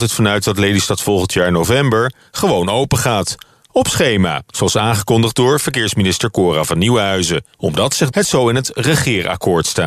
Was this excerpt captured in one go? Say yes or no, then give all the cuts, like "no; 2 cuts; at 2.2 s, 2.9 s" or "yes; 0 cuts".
no; 2 cuts; at 7.5 s, 8.1 s